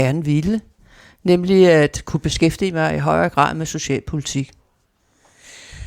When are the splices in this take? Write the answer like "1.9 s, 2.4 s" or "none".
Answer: none